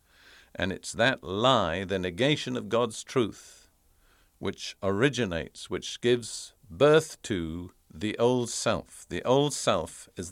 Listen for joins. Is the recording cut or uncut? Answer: uncut